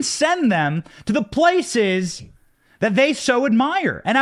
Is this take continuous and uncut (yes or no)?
yes